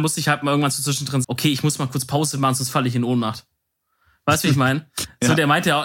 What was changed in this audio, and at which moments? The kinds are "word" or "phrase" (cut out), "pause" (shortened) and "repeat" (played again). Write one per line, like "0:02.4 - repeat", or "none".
0:01.2 - word